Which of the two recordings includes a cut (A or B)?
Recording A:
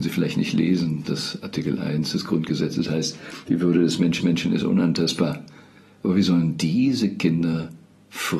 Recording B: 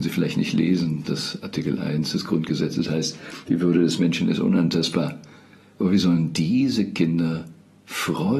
A